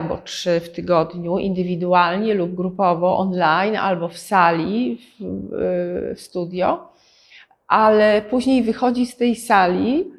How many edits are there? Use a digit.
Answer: 0